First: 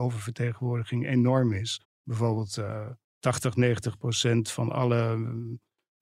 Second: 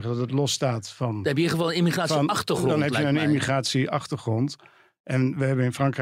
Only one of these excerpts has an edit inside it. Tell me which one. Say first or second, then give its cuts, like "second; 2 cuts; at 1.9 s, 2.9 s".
first; 2 cuts; at 1.8 s, 3.0 s